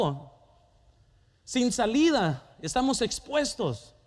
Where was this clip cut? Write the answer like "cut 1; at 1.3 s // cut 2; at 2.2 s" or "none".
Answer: none